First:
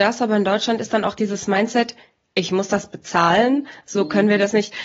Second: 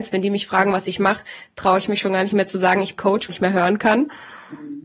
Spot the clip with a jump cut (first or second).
second